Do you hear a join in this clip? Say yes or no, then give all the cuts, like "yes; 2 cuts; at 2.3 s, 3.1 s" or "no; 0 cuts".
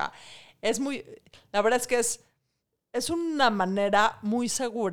no; 0 cuts